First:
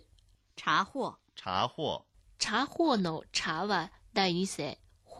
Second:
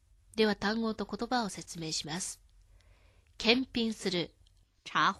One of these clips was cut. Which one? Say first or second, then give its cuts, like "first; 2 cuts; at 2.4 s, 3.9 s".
first; 1 cut; at 2.1 s